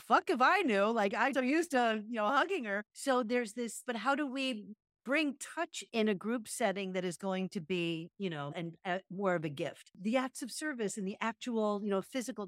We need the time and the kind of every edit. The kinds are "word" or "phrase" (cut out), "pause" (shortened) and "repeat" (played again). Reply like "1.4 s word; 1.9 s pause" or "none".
1.3 s word; 3.8 s phrase; 5.9 s word; 8.5 s word